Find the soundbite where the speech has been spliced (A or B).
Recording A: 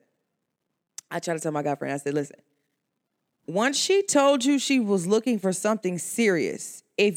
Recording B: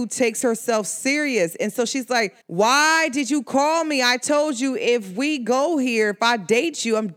B